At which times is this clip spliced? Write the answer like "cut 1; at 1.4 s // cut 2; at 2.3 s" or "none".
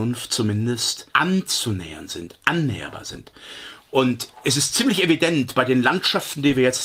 cut 1; at 1.1 s